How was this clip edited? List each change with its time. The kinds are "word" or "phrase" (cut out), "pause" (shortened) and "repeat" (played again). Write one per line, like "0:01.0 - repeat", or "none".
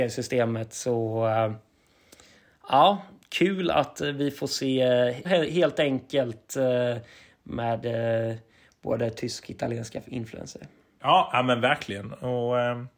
0:05.2 - word
0:09.4 - word